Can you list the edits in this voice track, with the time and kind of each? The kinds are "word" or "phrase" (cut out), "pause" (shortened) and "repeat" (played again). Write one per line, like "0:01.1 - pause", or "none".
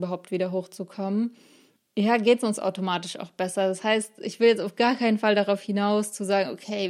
0:01.9 - word